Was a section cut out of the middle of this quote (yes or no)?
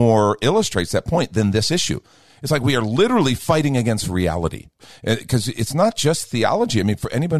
no